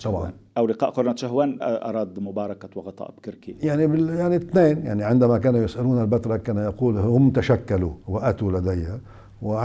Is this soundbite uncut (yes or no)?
no